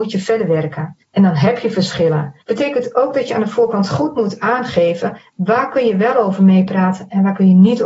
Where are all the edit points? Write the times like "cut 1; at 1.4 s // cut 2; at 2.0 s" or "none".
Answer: cut 1; at 1.0 s // cut 2; at 2.4 s